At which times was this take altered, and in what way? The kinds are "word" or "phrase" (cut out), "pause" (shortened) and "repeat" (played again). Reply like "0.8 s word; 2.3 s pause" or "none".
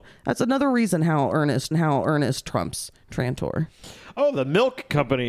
1.7 s repeat

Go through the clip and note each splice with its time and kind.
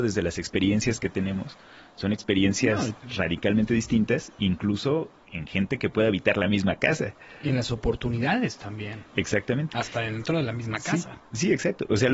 5.2 s word

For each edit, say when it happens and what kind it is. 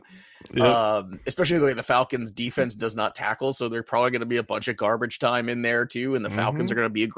none

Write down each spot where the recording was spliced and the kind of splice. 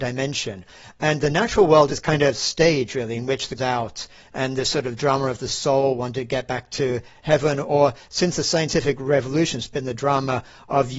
1.9 s phrase; 3.6 s phrase

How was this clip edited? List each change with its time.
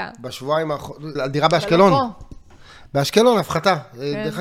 1.2 s phrase

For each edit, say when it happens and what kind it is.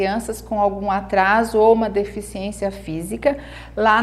none

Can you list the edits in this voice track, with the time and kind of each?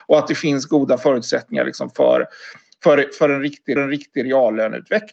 3.8 s repeat

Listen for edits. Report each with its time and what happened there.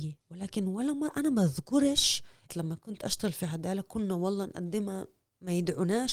2.5 s word

